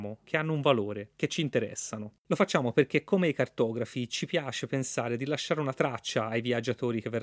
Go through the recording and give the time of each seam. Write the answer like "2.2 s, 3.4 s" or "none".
1.1 s, 2.2 s

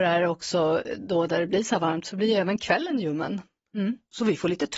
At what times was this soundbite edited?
none

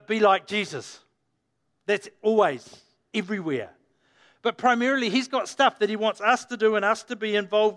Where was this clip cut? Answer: none

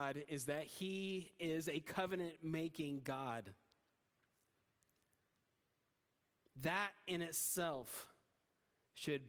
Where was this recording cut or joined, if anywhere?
none

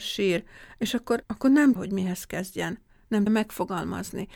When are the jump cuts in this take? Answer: 1.2 s, 1.8 s, 3.3 s

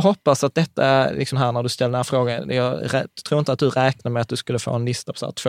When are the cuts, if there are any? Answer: 1.3 s

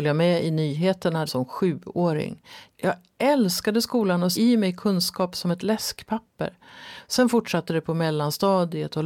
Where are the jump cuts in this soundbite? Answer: 1.3 s, 4.3 s

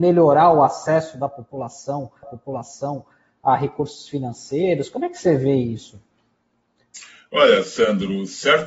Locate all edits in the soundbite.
2.2 s

